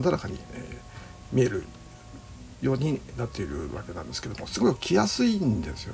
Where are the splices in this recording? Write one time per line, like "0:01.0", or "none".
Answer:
0:03.1